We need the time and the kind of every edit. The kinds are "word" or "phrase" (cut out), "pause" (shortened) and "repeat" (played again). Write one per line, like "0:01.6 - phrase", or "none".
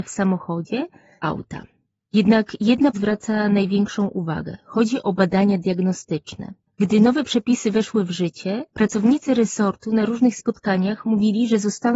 0:01.2 - phrase
0:02.9 - word